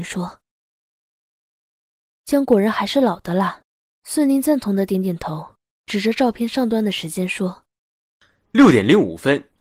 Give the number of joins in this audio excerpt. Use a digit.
0